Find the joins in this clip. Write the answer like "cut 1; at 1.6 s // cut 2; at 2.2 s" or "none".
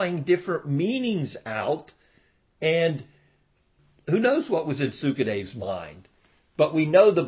none